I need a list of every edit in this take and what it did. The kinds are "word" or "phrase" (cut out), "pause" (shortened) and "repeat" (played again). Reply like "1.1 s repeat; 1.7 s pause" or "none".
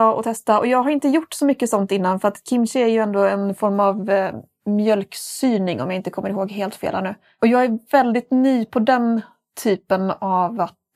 none